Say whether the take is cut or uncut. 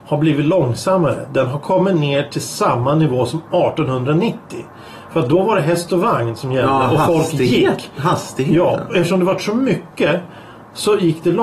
uncut